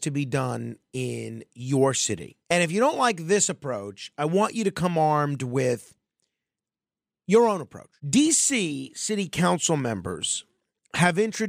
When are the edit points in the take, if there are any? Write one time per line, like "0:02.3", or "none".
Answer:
0:02.4
0:08.0